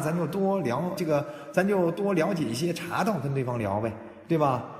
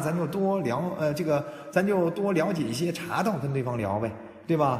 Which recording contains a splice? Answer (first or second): first